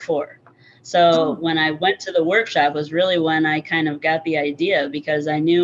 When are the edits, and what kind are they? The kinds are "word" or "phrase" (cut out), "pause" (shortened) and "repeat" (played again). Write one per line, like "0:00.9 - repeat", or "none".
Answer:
none